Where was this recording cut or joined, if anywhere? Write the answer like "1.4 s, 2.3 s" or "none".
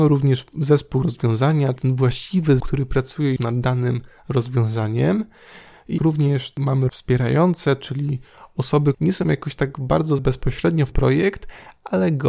1.0 s, 1.8 s, 2.6 s, 3.4 s, 6.0 s, 6.9 s, 8.9 s, 10.2 s, 10.9 s